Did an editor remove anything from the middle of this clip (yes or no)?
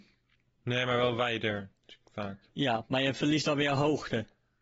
yes